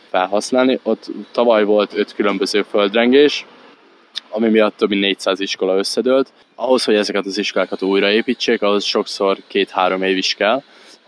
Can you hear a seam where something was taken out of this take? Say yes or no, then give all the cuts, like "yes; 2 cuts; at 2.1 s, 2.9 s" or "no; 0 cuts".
no; 0 cuts